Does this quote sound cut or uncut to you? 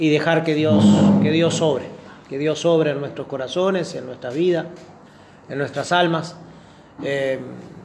cut